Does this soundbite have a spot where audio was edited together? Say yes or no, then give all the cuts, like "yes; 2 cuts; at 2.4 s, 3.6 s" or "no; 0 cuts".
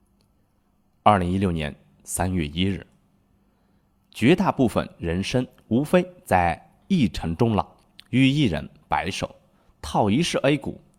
no; 0 cuts